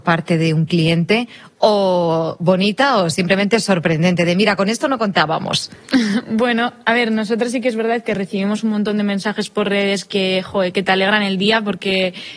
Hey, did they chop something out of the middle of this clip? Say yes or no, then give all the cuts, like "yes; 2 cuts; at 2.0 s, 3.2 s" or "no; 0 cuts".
no; 0 cuts